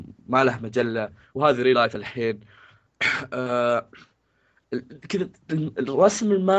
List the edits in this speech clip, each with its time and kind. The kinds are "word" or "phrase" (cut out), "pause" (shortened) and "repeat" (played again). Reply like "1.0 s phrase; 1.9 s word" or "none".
none